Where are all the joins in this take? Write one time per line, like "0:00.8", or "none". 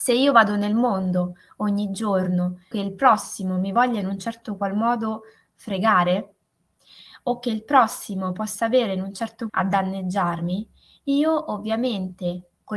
0:02.7
0:09.5